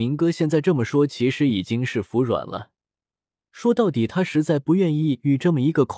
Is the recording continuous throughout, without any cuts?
yes; 0 cuts

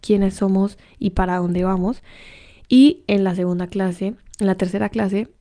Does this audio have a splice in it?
no; 0 cuts

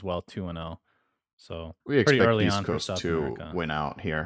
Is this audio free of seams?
no; 1 cut; at 1.8 s

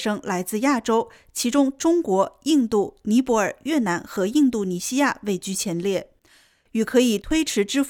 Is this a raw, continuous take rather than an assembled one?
yes; 0 cuts

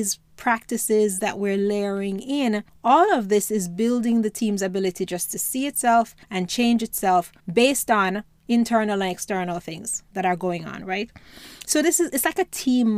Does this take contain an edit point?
yes; 3 cuts; at 2.7 s, 6.2 s, 7.4 s

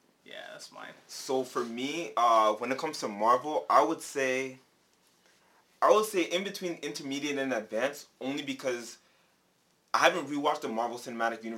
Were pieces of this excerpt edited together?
no; 0 cuts

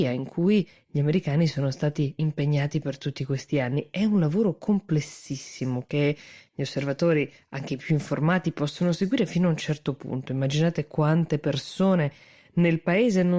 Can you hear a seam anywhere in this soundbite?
no; 0 cuts

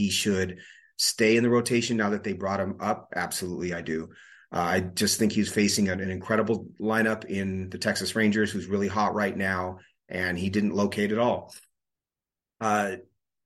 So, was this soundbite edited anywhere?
no; 0 cuts

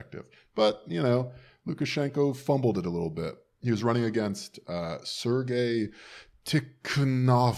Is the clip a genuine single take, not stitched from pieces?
yes; 0 cuts

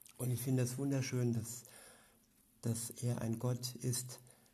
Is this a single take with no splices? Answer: yes; 0 cuts

